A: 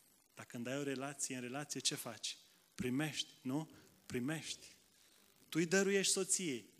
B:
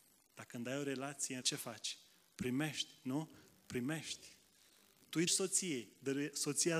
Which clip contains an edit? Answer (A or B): B